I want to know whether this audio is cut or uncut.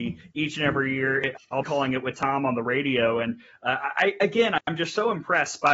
uncut